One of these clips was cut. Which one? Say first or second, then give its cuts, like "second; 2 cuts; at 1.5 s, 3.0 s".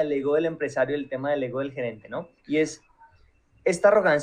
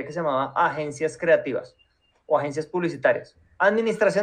first; 1 cut; at 2.4 s